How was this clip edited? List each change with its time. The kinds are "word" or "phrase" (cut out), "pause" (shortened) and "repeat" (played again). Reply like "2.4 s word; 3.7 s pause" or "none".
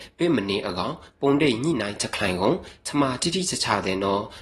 none